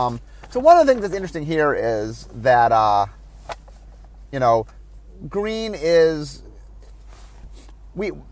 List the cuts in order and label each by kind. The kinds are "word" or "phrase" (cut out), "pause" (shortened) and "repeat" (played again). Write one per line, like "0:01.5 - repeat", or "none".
none